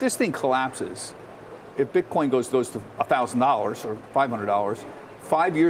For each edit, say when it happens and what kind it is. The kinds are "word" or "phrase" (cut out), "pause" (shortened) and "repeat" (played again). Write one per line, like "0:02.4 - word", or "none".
0:02.5 - repeat